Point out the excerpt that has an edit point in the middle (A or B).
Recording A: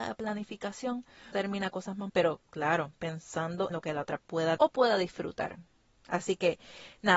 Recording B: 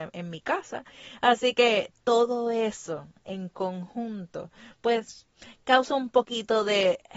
A